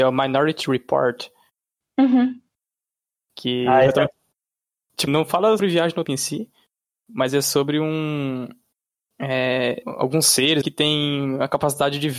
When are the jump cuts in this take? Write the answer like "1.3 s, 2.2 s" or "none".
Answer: 5.1 s, 5.6 s, 6.0 s, 9.8 s, 10.6 s